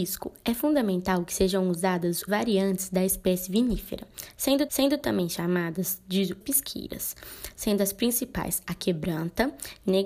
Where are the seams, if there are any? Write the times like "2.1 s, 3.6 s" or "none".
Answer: 2.3 s, 3.5 s, 4.7 s, 6.4 s